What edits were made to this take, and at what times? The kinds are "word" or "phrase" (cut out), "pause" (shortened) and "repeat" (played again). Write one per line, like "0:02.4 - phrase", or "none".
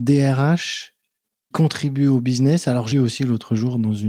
0:01.5 - word
0:02.9 - word